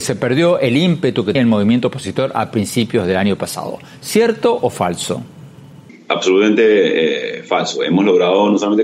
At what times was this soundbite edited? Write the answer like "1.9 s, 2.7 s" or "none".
1.3 s